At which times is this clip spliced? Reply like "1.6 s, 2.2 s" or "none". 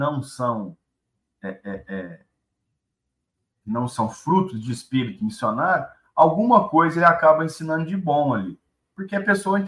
none